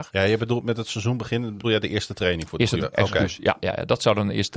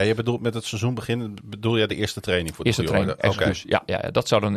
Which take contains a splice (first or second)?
first